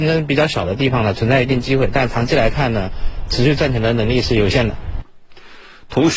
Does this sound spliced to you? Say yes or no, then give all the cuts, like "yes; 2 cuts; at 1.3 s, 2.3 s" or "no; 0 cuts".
yes; 1 cut; at 3.3 s